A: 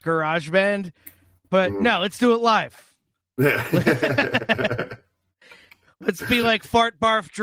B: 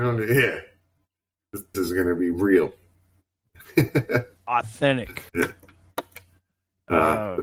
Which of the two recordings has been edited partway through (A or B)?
B